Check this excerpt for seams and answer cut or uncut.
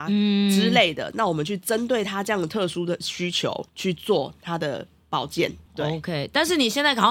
cut